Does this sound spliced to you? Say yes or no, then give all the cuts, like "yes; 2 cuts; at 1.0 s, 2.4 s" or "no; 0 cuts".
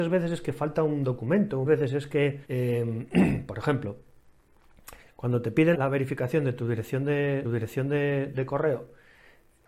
yes; 4 cuts; at 1.7 s, 2.4 s, 5.7 s, 7.4 s